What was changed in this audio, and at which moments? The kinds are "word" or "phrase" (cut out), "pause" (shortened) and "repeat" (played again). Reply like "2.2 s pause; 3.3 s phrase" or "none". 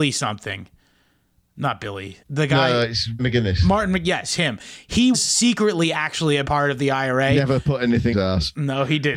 2.2 s pause; 3.2 s word; 5.1 s word; 6.4 s word; 8.1 s phrase